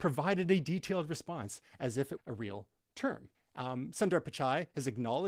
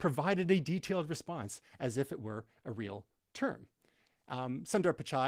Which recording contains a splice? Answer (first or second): first